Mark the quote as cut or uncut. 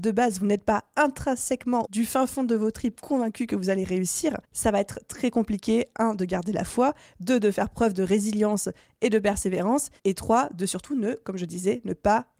cut